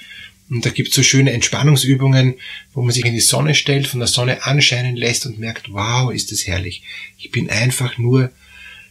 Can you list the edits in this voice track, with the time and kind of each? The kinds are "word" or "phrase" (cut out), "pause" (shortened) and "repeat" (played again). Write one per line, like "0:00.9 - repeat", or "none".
0:03.0 - word